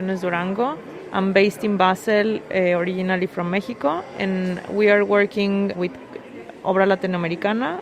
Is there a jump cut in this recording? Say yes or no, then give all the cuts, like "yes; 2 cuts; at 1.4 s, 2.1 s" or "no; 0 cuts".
yes; 1 cut; at 5.7 s